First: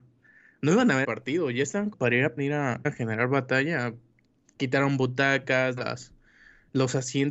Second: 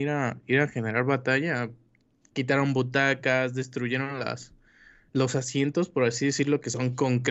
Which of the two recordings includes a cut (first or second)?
first